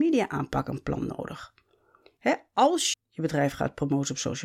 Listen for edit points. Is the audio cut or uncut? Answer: cut